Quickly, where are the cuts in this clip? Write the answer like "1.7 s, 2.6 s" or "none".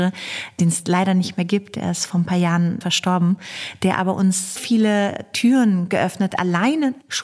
2.8 s, 4.6 s, 6.3 s